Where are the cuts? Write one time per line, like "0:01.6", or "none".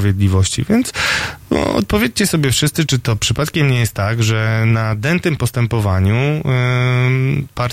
none